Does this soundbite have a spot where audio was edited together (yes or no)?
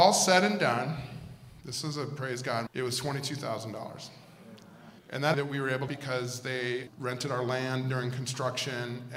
yes